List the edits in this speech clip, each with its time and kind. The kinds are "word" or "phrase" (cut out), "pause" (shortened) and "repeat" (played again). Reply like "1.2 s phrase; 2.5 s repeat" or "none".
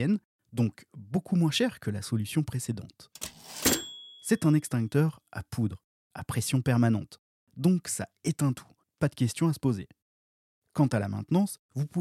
8.8 s pause

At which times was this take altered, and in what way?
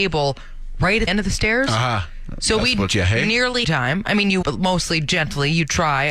1.1 s word; 2.9 s word; 3.6 s phrase; 4.4 s phrase

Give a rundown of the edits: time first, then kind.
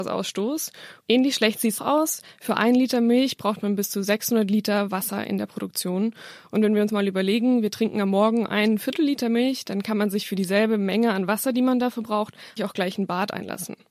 1.8 s phrase; 6.9 s word; 12.6 s word

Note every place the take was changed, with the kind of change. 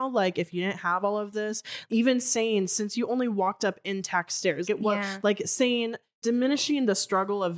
1.9 s word; 4.6 s word

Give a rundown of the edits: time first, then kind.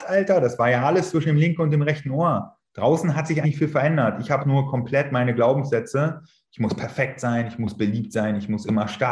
3.4 s word; 4.4 s word

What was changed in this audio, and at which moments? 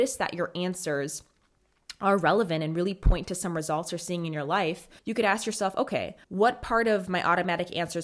5.0 s pause; 6.2 s pause

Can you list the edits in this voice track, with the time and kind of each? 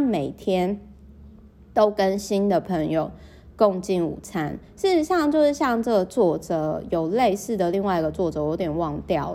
none

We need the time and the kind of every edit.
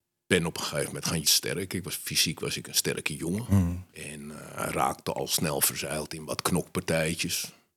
1.2 s phrase; 3.9 s pause

